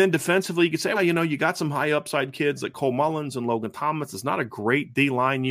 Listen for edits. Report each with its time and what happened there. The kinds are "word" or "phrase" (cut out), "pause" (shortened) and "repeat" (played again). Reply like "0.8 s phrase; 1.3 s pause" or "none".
0.9 s word